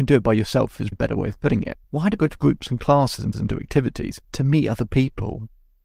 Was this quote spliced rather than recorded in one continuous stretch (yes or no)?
yes